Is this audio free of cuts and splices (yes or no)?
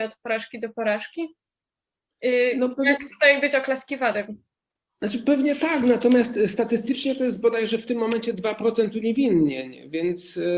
yes